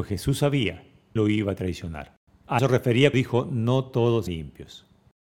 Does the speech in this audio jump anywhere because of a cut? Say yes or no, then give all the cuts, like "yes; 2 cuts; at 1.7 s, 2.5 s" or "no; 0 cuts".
yes; 4 cuts; at 1.2 s, 2.6 s, 3.1 s, 4.3 s